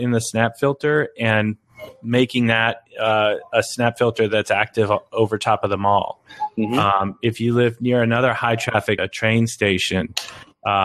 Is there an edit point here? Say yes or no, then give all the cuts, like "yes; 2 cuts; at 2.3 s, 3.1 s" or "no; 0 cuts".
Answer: yes; 1 cut; at 9.0 s